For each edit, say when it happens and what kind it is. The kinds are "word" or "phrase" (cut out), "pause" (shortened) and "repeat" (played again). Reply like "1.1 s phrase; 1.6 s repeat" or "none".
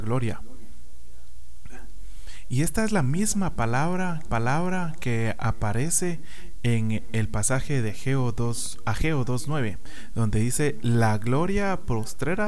4.3 s repeat